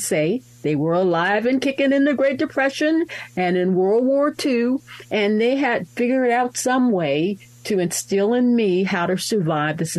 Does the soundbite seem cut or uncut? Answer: uncut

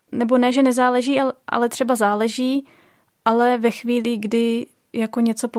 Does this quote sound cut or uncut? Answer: uncut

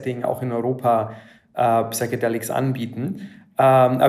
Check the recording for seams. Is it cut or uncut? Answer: uncut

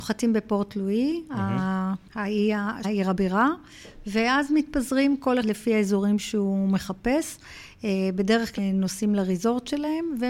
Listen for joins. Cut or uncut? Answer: cut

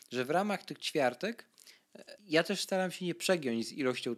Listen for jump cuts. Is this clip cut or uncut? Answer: cut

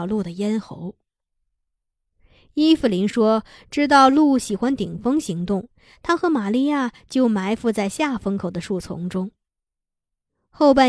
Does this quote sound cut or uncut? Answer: uncut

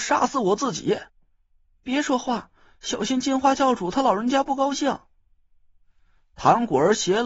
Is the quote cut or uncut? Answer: cut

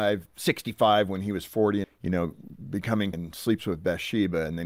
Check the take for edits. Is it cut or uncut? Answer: cut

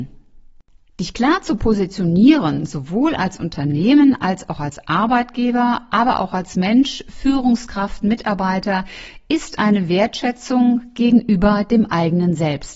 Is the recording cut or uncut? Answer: uncut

